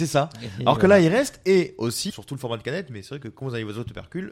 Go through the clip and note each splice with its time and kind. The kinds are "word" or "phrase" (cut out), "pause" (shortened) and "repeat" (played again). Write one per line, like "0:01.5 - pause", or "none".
0:02.1 - word